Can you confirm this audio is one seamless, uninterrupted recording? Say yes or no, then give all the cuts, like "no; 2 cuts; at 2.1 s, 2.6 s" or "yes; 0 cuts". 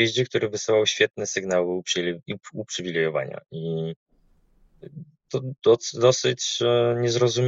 no; 1 cut; at 5.3 s